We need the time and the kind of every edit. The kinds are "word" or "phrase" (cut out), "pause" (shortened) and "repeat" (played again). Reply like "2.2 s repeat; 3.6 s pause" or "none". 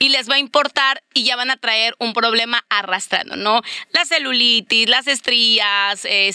none

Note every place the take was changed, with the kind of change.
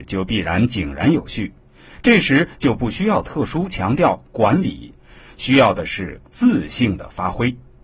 none

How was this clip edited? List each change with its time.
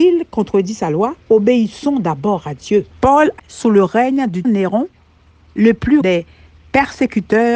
1.2 s pause; 2.9 s pause; 3.4 s phrase; 4.4 s word; 6.0 s word

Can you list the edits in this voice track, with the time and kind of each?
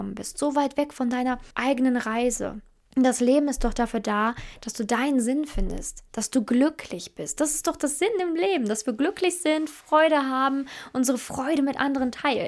1.5 s pause; 2.8 s pause

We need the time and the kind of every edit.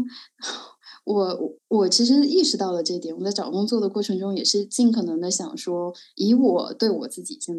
1.6 s pause

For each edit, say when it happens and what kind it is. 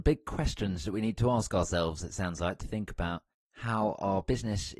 2.6 s word

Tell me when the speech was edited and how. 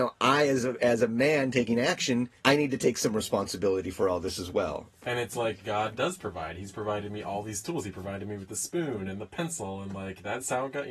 2.4 s pause

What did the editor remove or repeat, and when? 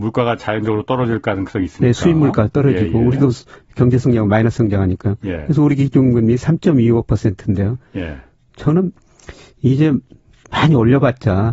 none

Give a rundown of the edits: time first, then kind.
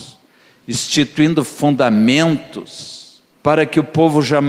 3.3 s pause

